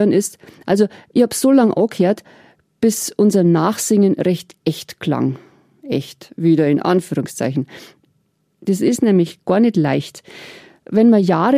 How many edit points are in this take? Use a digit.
1